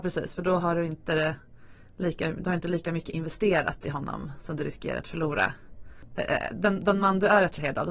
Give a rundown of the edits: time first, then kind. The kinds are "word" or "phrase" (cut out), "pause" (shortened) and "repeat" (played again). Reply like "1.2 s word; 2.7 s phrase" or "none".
none

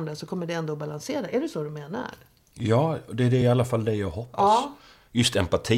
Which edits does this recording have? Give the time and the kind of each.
none

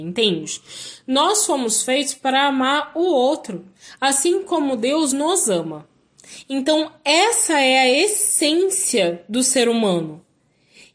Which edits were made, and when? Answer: none

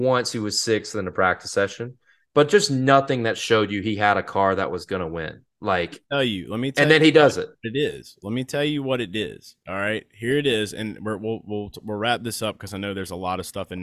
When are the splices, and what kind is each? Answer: none

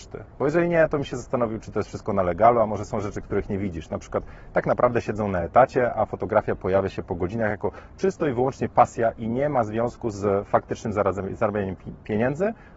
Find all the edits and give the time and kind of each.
none

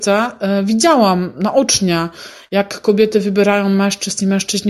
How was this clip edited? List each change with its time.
none

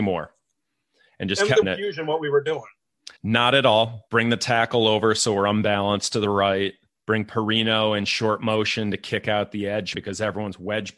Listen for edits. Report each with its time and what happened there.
1.6 s word; 3.2 s pause; 4.1 s pause; 6.9 s pause; 9.9 s word

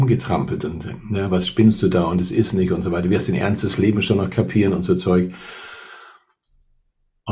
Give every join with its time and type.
none

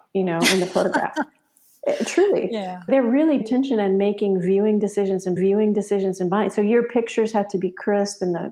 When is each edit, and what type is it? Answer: 2.9 s word; 3.4 s word; 5.4 s repeat

